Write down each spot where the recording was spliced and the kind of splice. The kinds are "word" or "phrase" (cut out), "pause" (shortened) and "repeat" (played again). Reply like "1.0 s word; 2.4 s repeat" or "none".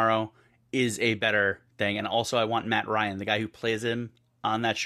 none